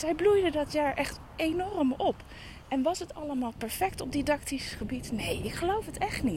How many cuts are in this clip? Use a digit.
0